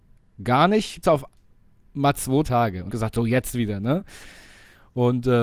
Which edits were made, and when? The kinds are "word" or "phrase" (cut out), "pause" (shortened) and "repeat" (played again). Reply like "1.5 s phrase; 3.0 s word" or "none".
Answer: 1.0 s word; 2.4 s word; 2.9 s word